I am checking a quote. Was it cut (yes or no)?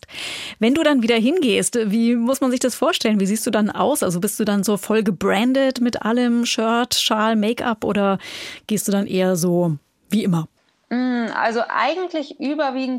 no